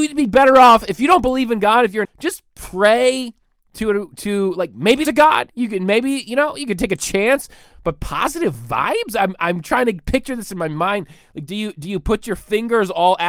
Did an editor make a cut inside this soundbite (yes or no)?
yes